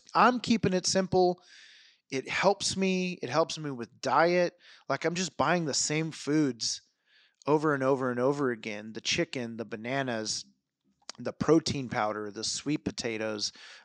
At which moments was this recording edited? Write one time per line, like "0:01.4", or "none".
none